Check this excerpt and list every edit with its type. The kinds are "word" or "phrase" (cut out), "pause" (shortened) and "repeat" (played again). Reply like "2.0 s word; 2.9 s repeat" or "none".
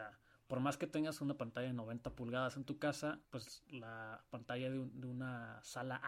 3.2 s pause